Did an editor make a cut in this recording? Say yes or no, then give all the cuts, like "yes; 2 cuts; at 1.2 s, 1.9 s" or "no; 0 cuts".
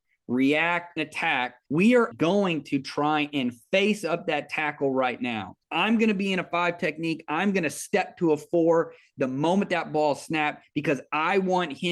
yes; 4 cuts; at 1.0 s, 1.7 s, 2.1 s, 5.6 s